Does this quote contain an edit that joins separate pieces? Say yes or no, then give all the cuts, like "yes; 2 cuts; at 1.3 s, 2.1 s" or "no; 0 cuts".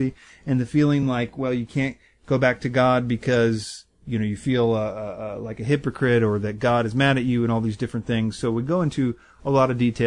no; 0 cuts